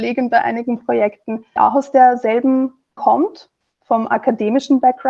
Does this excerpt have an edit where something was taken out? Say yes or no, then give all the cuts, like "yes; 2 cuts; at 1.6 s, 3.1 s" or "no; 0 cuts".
yes; 2 cuts; at 1.6 s, 3.0 s